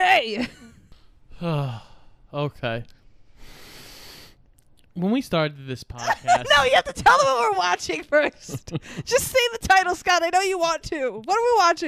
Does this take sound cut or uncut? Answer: uncut